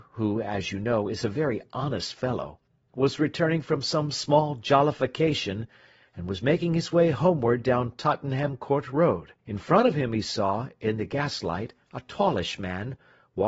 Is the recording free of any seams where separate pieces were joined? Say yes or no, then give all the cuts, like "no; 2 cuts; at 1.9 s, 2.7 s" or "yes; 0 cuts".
no; 1 cut; at 9.4 s